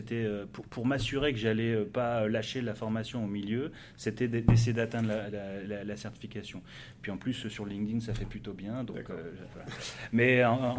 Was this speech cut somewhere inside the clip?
no; 0 cuts

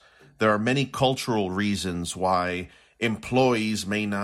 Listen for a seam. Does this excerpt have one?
no; 0 cuts

